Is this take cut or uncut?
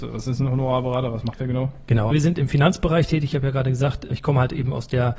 cut